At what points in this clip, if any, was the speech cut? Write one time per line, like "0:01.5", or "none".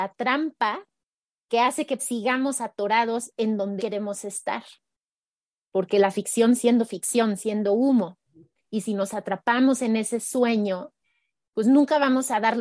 0:02.0
0:03.8
0:06.6
0:07.4